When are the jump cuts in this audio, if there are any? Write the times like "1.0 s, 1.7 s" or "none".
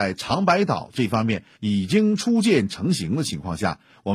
1.5 s